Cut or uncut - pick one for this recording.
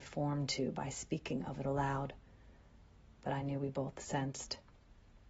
uncut